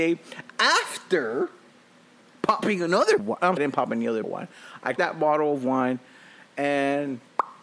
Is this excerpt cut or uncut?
cut